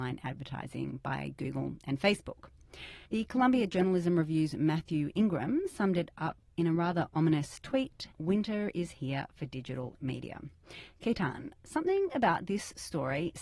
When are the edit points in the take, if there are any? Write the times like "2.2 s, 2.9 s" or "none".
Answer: 3.1 s, 8.1 s